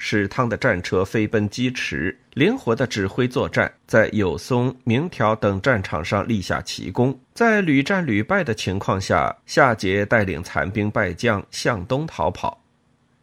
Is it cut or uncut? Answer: cut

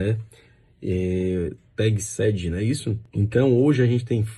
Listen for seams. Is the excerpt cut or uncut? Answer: cut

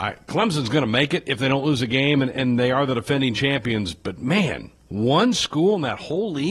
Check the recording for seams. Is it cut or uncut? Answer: uncut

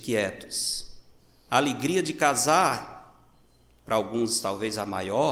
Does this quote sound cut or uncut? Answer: uncut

